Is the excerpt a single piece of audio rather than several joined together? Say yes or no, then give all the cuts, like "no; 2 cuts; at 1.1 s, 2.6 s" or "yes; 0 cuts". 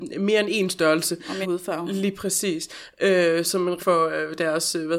no; 3 cuts; at 1.4 s, 3.4 s, 3.8 s